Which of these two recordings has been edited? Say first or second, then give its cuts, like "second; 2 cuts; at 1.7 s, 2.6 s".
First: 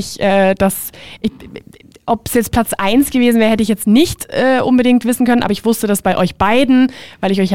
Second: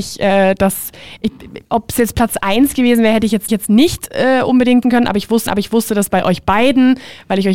second; 4 cuts; at 1.6 s, 3.5 s, 4.8 s, 5.5 s